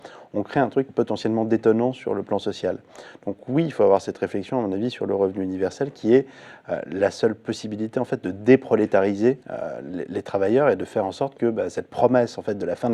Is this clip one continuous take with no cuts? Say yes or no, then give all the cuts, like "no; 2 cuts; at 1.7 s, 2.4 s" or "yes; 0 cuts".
no; 1 cut; at 9.4 s